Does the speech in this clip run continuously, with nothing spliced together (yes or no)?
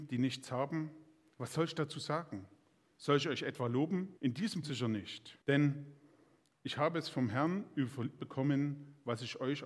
no